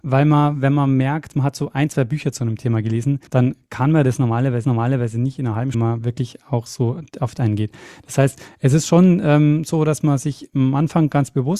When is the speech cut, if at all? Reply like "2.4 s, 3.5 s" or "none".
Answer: 3.3 s, 4.6 s, 5.7 s, 7.4 s

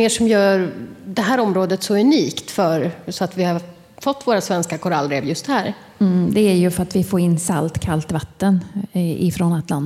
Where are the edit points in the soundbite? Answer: none

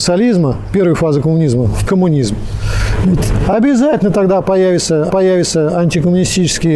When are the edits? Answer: 1.9 s, 5.1 s

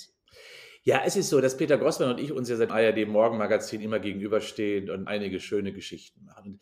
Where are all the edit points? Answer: 2.7 s, 5.1 s

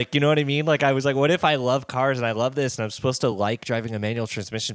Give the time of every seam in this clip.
none

